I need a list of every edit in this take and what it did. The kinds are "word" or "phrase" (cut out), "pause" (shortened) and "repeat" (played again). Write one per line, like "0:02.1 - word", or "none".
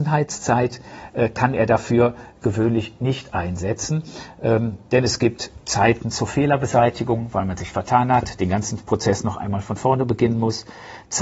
none